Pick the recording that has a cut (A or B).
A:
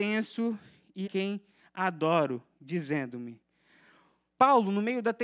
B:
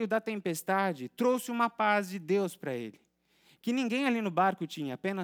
A